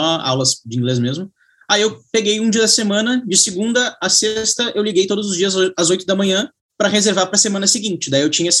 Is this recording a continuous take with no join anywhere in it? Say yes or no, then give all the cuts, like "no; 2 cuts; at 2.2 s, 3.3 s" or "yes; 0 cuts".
yes; 0 cuts